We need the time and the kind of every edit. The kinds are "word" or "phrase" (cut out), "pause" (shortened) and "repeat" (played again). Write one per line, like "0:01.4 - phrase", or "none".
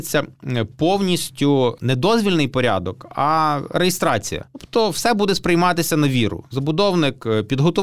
none

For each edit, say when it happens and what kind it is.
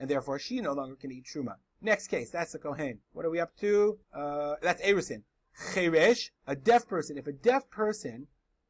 0:03.0 - pause
0:04.0 - pause
0:06.4 - pause

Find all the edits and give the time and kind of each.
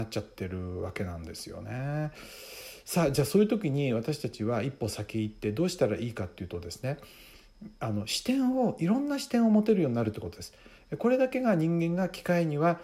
none

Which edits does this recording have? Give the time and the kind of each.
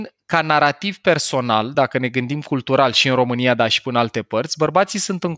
none

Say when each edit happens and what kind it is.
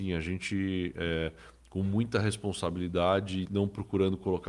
0:03.4 - word

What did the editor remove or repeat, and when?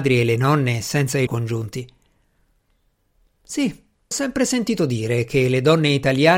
0:01.3 - word
0:04.1 - word

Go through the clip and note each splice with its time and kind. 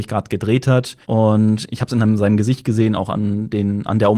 0:01.0 - pause

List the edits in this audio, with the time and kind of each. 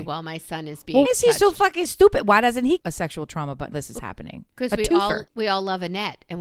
0:01.0 - word
0:02.8 - word
0:03.7 - phrase
0:05.3 - pause

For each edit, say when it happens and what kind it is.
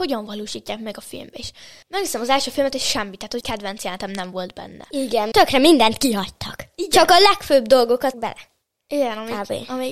0:01.8 - pause
0:03.4 - word
0:05.3 - word
0:08.1 - word

